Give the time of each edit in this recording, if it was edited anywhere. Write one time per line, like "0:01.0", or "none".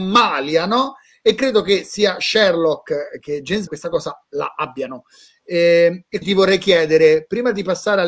0:03.2
0:03.7
0:06.2